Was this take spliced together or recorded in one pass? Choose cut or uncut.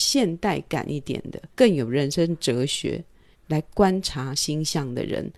cut